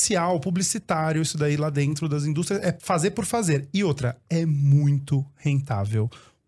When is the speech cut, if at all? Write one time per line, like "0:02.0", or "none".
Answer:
none